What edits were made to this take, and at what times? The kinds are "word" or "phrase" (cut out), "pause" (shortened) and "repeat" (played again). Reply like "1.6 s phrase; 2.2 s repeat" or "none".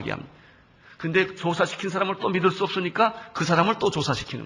none